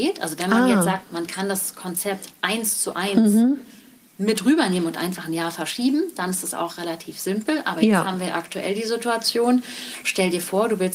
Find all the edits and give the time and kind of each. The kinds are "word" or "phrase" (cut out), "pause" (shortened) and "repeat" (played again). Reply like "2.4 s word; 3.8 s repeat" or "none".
none